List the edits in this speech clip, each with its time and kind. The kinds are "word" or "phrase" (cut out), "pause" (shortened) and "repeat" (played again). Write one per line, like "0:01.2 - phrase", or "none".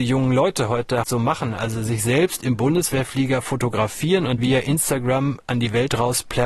0:01.0 - word
0:04.4 - word

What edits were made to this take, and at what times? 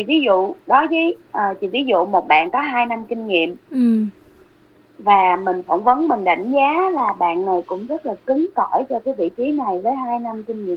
0:01.3 - pause

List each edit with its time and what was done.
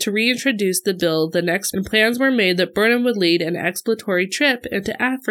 0:01.7 - word

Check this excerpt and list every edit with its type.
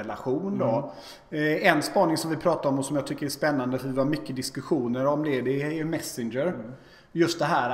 none

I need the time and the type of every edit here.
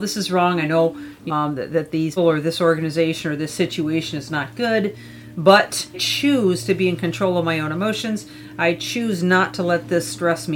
0:01.3 - word
0:02.2 - word
0:05.9 - word

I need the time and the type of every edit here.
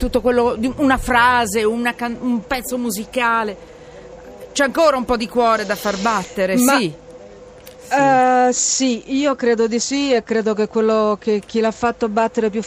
0:07.8 - pause

